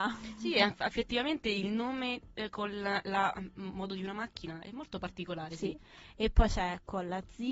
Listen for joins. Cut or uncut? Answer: uncut